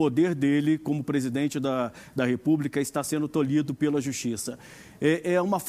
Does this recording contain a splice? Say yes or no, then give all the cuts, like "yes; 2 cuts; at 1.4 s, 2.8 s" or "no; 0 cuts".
no; 0 cuts